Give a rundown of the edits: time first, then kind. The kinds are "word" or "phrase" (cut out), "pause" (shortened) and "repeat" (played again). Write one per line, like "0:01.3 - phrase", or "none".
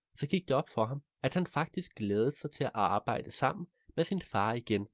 none